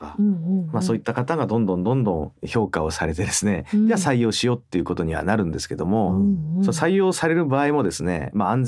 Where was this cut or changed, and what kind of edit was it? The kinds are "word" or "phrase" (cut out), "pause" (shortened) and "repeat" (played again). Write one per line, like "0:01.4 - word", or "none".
0:02.4 - pause